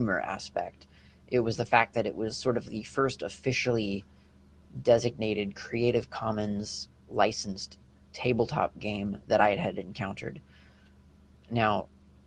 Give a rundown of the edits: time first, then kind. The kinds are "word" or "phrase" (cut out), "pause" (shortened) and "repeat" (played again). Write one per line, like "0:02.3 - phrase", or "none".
none